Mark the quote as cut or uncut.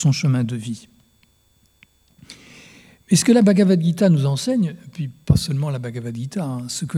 uncut